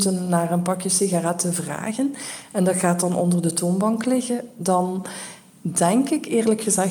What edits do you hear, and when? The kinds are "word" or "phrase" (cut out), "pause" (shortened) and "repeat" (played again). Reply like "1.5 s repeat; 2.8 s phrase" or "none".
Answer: none

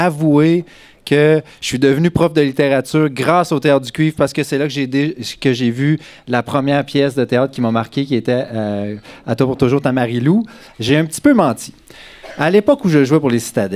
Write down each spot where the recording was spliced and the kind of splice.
none

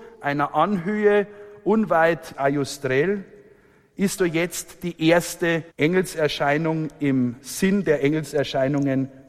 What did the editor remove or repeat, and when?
2.3 s phrase; 4.2 s word; 5.7 s pause

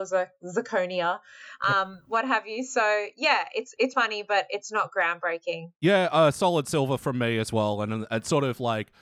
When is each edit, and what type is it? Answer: 3.9 s word; 5.8 s pause

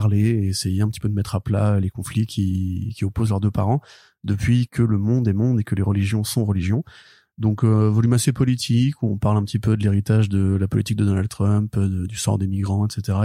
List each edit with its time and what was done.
none

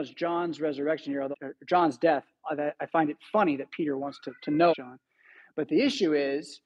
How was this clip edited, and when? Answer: 1.3 s word; 4.4 s pause; 4.7 s word

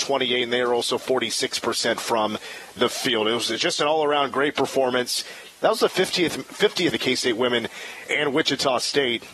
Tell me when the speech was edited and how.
6.9 s phrase

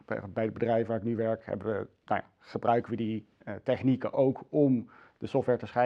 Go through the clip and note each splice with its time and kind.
none

